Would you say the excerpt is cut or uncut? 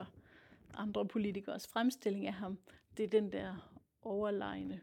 uncut